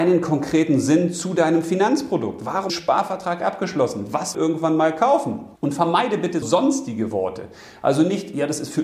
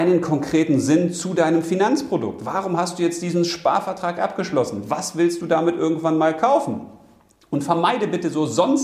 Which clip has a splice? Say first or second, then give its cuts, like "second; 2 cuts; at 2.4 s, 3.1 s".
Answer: first; 4 cuts; at 2.7 s, 4.3 s, 5.6 s, 6.4 s